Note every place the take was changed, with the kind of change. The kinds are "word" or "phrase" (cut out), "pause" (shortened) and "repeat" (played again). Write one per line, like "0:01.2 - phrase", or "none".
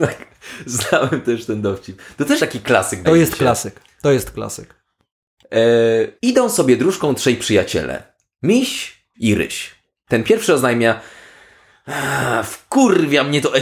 0:02.4 - word
0:03.0 - word
0:06.2 - pause
0:09.1 - word

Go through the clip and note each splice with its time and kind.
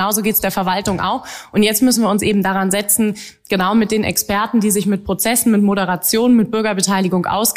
none

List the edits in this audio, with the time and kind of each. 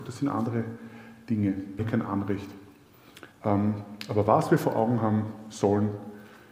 0:01.8 - word
0:03.3 - pause

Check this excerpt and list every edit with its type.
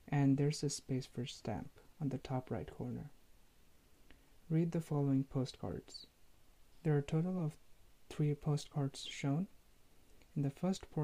none

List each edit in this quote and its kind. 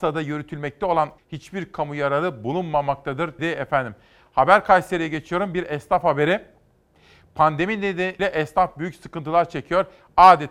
0:01.2 - phrase
0:03.4 - word
0:08.2 - word

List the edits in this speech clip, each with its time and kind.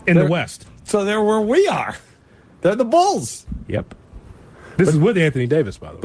none

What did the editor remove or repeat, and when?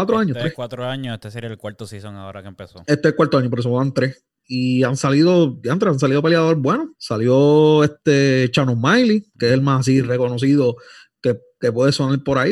0:06.9 - pause

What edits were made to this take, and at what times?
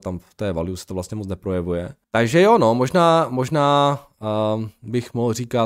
0:02.0 - pause

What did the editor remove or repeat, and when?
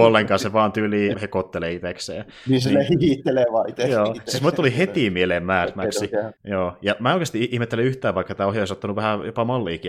0:01.1 - word
0:06.4 - pause

